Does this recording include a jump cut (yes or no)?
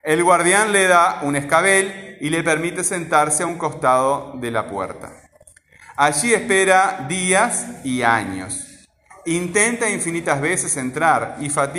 no